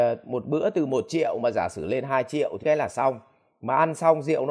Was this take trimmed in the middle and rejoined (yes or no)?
yes